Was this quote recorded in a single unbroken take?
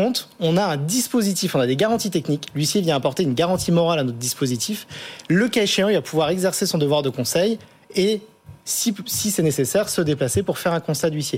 yes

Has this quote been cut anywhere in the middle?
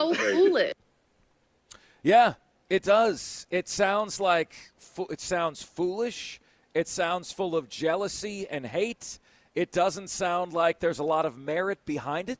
no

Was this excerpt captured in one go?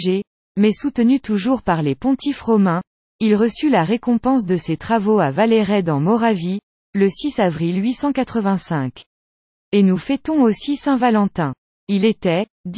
yes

